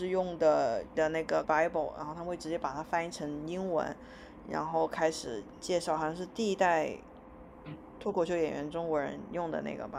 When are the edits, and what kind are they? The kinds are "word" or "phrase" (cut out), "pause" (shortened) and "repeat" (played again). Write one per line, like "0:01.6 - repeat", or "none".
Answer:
0:00.9 - word
0:01.4 - word